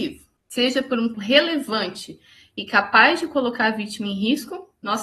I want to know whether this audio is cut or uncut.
cut